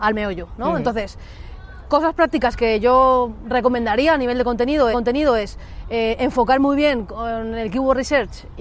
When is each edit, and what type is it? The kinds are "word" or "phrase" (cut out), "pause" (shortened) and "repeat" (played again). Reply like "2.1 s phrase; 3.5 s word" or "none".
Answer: 4.9 s repeat